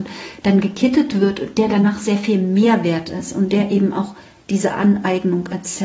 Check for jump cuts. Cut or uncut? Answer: uncut